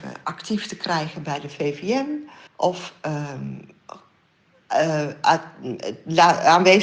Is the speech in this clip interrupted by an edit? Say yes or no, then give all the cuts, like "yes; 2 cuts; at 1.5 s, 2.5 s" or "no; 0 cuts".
yes; 1 cut; at 2.5 s